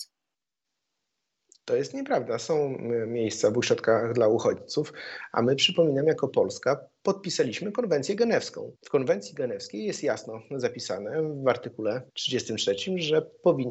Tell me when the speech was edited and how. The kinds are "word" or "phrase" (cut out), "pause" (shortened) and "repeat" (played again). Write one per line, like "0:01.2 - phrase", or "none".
0:08.8 - pause
0:12.1 - pause